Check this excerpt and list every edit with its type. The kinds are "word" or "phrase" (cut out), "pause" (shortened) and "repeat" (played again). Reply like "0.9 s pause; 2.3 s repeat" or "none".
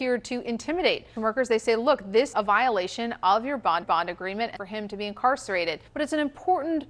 1.2 s word; 2.3 s word; 3.8 s repeat; 4.5 s phrase; 5.9 s pause